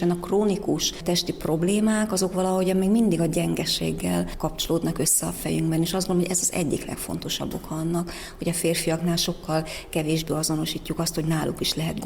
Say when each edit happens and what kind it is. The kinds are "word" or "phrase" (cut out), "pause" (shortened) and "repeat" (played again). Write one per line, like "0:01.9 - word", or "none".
none